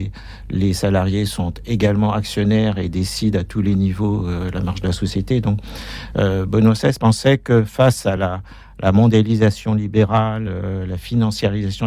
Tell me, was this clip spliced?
no; 0 cuts

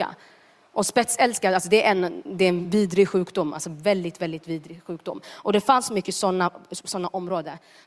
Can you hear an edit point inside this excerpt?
no; 0 cuts

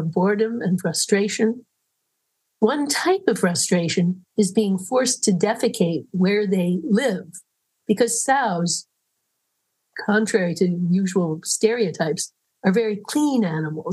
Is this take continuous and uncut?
yes; 0 cuts

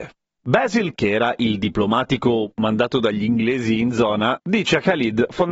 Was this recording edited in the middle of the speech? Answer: yes; 1 cut; at 0.9 s

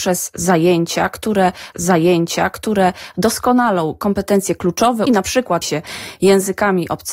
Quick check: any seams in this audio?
yes; 3 cuts; at 1.7 s, 5.1 s, 5.6 s

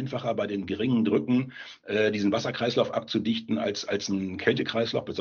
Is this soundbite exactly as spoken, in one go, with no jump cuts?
yes; 0 cuts

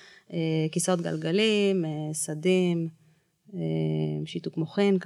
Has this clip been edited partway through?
no; 0 cuts

